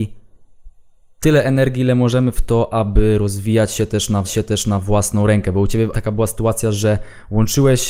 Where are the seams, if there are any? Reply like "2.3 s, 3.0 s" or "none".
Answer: 4.2 s, 5.9 s

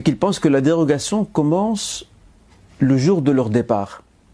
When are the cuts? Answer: none

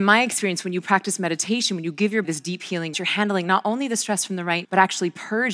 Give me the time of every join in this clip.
2.2 s, 2.9 s, 4.6 s

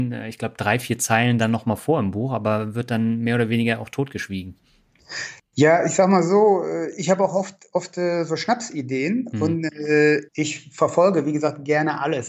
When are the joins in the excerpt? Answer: 10.3 s

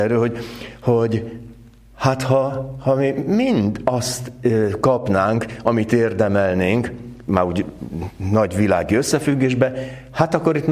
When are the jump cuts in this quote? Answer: none

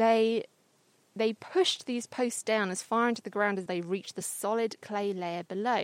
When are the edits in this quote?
3.7 s

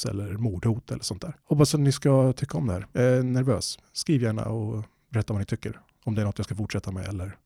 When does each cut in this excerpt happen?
1.4 s, 2.9 s

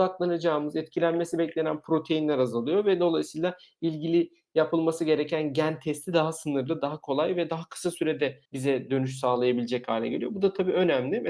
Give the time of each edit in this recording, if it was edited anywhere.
8.4 s

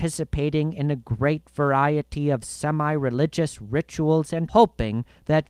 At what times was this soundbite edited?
4.5 s

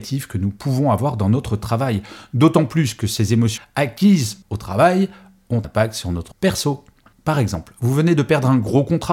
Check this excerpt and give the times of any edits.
3.6 s, 5.6 s, 6.3 s

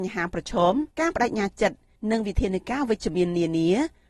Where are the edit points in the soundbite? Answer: 0.9 s

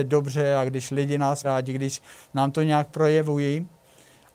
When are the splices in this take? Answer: 1.4 s

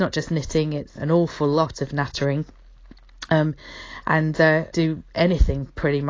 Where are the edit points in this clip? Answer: 0.9 s, 4.7 s

